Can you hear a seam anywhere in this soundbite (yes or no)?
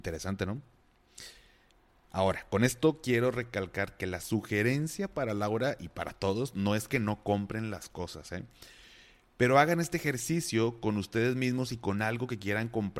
no